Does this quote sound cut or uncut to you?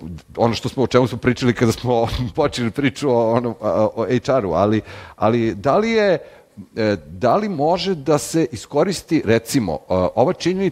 uncut